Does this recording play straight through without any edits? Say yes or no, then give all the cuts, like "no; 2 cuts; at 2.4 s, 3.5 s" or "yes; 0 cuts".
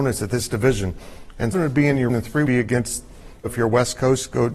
no; 4 cuts; at 1.5 s, 2.1 s, 2.5 s, 3.5 s